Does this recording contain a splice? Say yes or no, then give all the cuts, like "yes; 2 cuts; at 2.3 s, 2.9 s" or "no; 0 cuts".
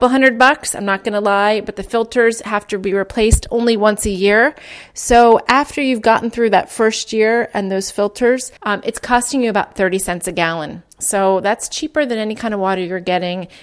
yes; 2 cuts; at 8.6 s, 10.9 s